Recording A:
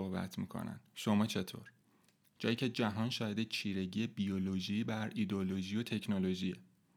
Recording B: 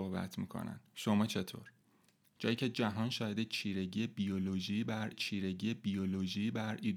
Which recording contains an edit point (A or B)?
B